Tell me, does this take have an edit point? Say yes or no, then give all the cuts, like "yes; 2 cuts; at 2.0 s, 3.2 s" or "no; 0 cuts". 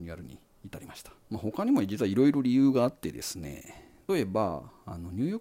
yes; 1 cut; at 1.2 s